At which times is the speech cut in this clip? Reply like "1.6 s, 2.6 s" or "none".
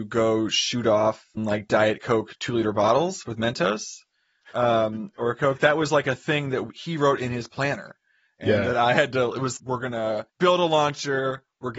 1.4 s, 9.6 s, 10.3 s